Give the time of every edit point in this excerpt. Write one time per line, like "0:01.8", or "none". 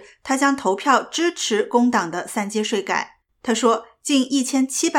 0:03.2